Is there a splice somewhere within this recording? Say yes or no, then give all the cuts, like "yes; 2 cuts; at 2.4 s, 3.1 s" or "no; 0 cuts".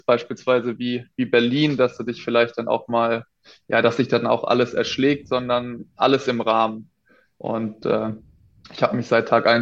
no; 0 cuts